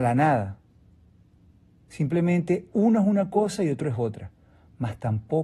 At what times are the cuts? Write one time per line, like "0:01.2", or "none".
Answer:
none